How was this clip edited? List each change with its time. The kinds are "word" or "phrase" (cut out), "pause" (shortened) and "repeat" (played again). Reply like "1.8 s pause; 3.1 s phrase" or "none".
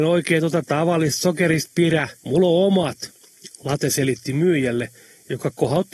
2.2 s pause